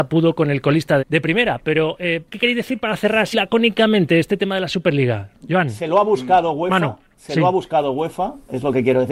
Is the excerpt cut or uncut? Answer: cut